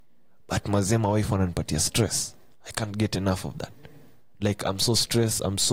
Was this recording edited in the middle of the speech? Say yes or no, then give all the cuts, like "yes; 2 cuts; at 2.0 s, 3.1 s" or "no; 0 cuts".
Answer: no; 0 cuts